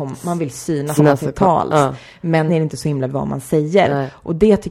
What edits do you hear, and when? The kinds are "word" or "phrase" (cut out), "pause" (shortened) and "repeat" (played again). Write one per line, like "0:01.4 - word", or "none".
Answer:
0:01.0 - word
0:02.5 - word
0:03.1 - word